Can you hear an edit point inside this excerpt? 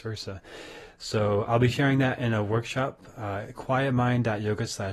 no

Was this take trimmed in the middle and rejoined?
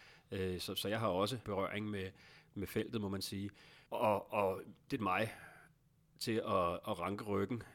yes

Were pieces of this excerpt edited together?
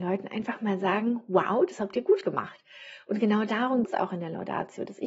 yes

